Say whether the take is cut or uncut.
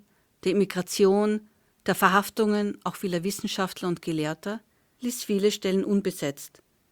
uncut